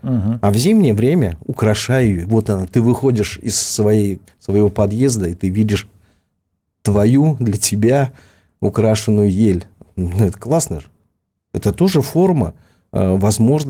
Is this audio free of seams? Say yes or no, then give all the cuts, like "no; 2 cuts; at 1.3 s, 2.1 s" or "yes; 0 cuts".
no; 1 cut; at 4.3 s